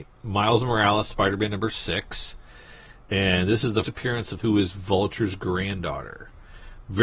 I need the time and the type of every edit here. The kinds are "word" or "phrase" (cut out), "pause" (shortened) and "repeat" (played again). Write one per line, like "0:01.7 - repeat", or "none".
0:03.8 - word
0:04.4 - word